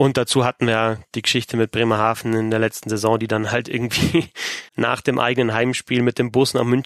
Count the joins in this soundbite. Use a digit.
1